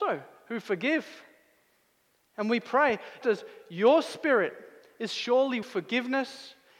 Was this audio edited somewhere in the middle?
yes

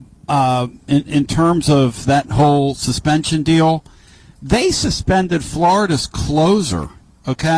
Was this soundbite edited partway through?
no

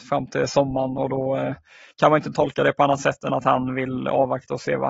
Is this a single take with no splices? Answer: yes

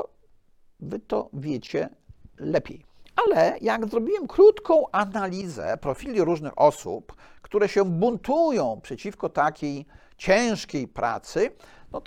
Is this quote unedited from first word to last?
yes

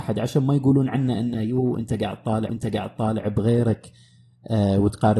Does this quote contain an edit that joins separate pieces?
yes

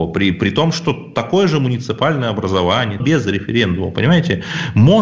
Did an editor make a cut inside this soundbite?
yes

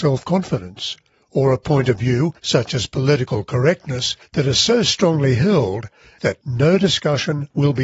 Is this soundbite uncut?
yes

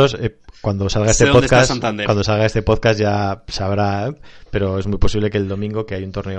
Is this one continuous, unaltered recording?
yes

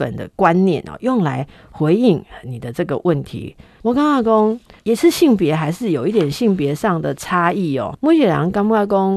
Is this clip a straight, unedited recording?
no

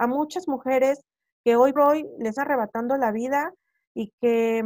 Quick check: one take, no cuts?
no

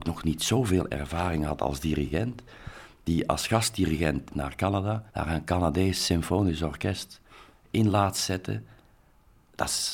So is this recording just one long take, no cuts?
no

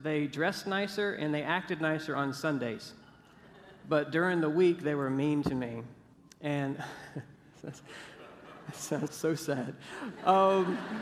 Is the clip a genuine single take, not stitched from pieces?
no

